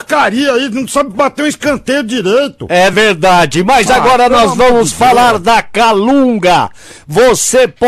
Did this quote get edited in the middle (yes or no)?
no